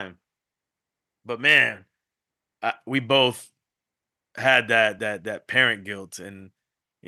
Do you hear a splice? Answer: no; 0 cuts

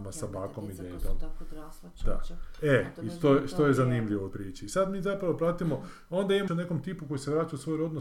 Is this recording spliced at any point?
yes; 2 cuts; at 4.3 s, 6.5 s

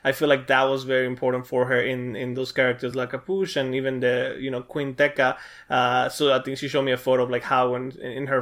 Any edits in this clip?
no; 0 cuts

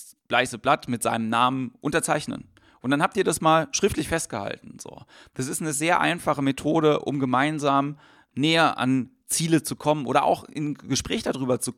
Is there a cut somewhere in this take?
no; 0 cuts

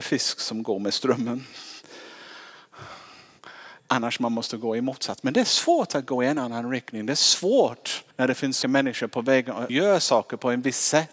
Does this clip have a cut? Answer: yes; 4 cuts; at 3.8 s, 8.1 s, 8.6 s, 9.7 s

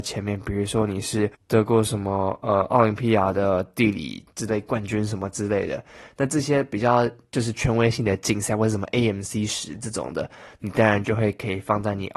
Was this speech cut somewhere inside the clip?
no; 0 cuts

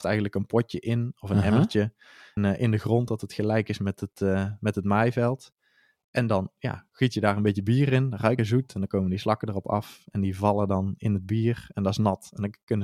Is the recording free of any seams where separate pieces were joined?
no; 2 cuts; at 2.4 s, 8.4 s

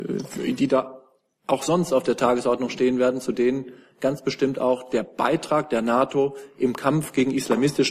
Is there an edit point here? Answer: no; 0 cuts

